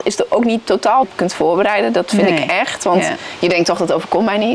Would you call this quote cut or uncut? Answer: cut